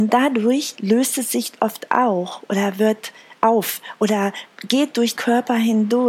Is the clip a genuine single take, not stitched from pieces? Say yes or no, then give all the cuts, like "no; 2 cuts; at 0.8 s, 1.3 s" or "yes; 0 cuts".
no; 1 cut; at 5.2 s